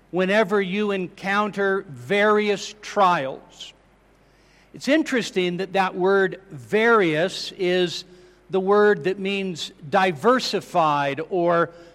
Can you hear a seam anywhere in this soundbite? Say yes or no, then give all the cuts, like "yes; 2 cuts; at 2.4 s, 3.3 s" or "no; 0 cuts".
no; 0 cuts